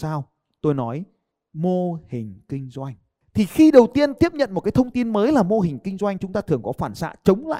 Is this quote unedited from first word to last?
yes; 0 cuts

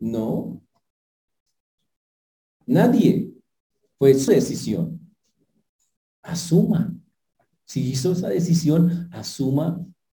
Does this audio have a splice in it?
yes; 1 cut; at 4.3 s

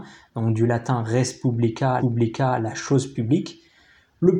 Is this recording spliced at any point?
yes; 1 cut; at 2.0 s

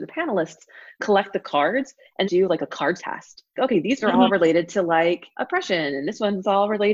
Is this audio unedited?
no; 5 cuts; at 2.2 s, 3.0 s, 3.6 s, 4.0 s, 5.3 s

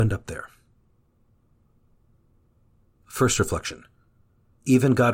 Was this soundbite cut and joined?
no; 0 cuts

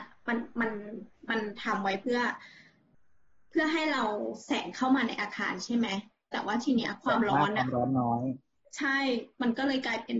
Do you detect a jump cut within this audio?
no; 0 cuts

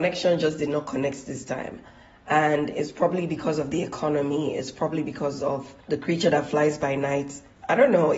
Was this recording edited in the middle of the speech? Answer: no; 0 cuts

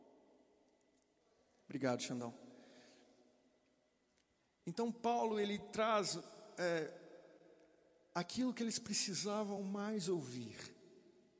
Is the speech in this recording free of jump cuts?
yes; 0 cuts

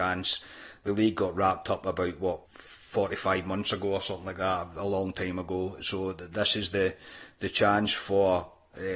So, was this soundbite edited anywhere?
yes; 1 cut; at 2.5 s

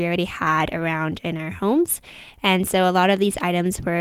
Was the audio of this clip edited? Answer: no; 0 cuts

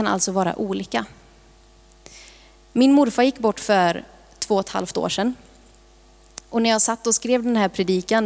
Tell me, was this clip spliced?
no; 0 cuts

